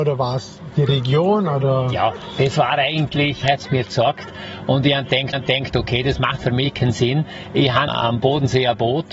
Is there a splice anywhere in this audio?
yes; 3 cuts; at 3.4 s, 5.3 s, 7.9 s

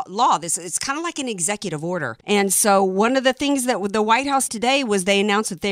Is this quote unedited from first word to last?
no; 2 cuts; at 2.2 s, 4.5 s

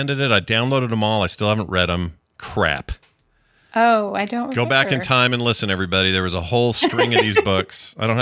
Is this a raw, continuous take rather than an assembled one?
no; 1 cut; at 2.2 s

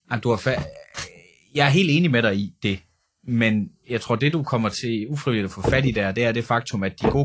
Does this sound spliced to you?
no; 0 cuts

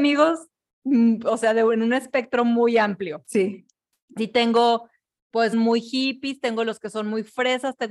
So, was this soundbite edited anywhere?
yes; 2 cuts; at 4.2 s, 5.5 s

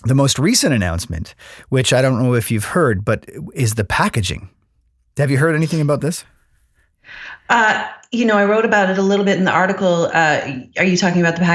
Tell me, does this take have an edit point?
no; 0 cuts

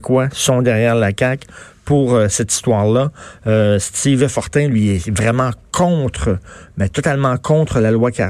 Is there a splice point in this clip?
no; 0 cuts

